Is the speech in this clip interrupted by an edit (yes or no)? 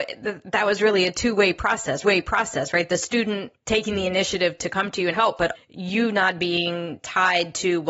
yes